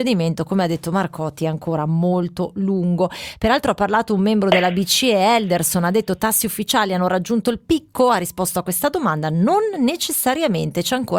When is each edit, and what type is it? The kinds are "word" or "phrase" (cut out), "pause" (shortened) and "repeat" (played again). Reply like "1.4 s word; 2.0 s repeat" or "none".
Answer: none